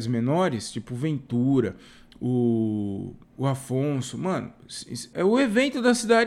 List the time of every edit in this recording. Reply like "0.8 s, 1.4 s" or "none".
3.2 s, 5.1 s